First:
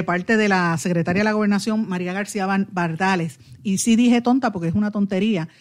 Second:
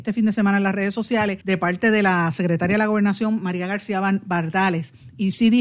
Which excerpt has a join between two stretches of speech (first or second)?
second